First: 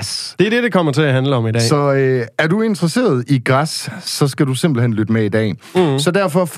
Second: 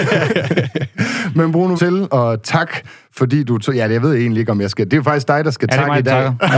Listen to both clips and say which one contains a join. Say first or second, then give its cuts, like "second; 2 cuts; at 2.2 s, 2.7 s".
second; 1 cut; at 1.8 s